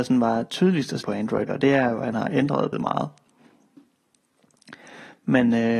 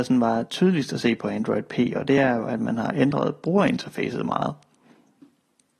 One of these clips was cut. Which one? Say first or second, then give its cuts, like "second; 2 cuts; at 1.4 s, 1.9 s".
first; 4 cuts; at 1.0 s, 1.5 s, 2.1 s, 2.7 s